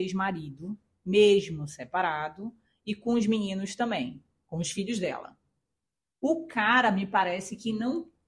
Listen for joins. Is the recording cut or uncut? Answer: uncut